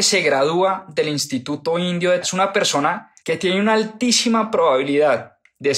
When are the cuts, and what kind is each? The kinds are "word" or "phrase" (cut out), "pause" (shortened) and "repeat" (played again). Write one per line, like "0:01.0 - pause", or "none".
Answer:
0:02.2 - word
0:03.2 - pause